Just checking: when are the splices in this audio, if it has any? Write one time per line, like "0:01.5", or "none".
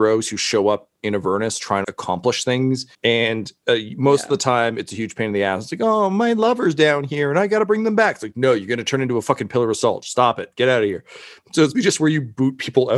0:01.8
0:02.9
0:11.7